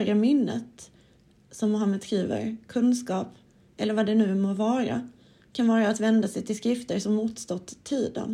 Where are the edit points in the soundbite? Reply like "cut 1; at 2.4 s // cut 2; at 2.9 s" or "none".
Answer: none